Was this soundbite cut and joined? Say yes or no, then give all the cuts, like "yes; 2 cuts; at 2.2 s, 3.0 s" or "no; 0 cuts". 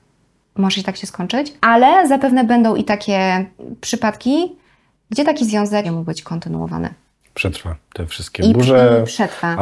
yes; 2 cuts; at 1.6 s, 5.8 s